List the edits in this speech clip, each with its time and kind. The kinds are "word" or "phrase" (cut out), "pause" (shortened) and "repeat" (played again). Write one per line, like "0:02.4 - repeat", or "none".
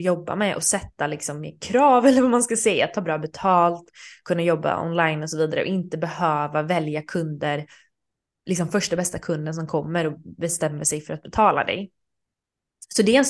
none